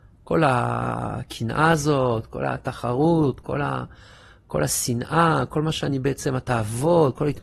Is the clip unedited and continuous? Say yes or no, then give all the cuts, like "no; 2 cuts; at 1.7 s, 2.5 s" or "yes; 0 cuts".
yes; 0 cuts